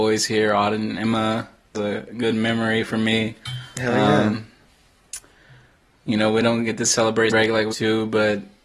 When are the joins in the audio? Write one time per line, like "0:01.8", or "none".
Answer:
0:01.7
0:07.3
0:07.7